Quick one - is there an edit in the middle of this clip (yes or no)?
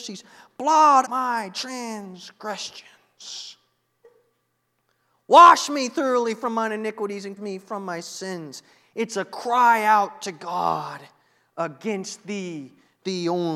yes